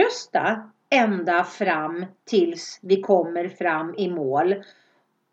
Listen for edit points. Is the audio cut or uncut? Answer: uncut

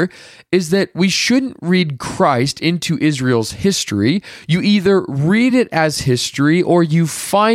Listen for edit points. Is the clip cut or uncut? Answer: uncut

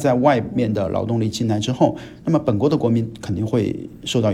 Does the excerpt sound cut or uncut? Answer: uncut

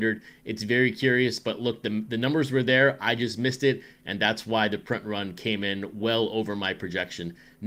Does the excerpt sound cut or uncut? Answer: uncut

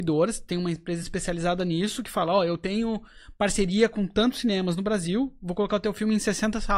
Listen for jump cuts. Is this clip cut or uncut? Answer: uncut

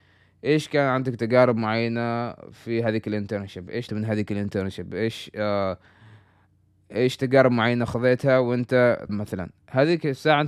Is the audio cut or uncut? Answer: cut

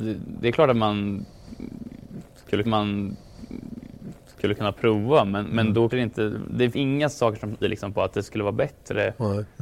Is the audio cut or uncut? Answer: cut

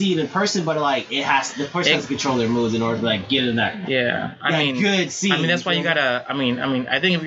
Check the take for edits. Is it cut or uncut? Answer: uncut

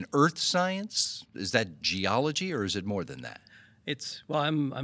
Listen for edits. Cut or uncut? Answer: uncut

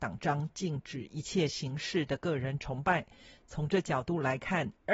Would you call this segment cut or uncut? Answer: uncut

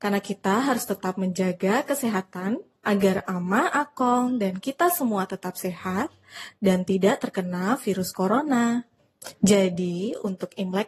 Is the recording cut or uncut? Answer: uncut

